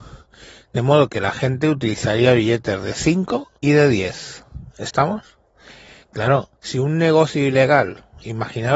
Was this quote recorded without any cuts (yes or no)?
no